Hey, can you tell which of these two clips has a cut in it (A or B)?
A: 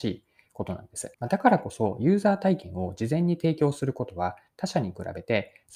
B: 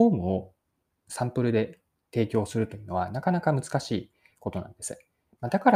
A